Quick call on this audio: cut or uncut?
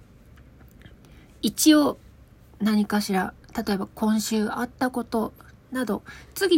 uncut